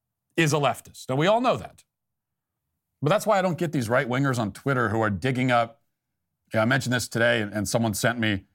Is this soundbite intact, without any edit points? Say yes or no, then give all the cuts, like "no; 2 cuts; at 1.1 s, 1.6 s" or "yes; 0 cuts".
yes; 0 cuts